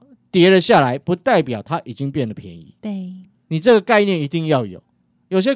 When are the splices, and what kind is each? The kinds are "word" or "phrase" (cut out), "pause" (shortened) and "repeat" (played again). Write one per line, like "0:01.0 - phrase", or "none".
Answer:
none